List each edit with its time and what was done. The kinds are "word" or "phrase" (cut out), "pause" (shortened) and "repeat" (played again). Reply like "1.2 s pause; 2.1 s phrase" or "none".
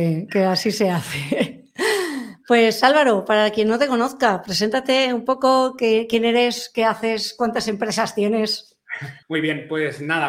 9.2 s pause